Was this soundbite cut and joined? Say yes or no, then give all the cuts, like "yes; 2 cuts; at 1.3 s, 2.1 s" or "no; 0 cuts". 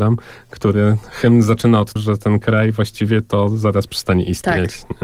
yes; 1 cut; at 2.0 s